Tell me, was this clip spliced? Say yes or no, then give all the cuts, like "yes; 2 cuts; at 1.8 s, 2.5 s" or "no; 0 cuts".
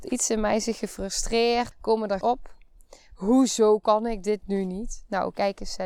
yes; 2 cuts; at 1.7 s, 2.2 s